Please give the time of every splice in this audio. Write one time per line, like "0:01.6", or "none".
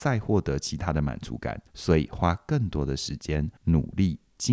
0:01.7
0:03.6